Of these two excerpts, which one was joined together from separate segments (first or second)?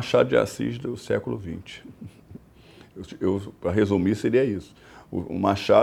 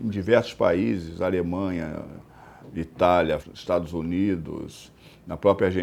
second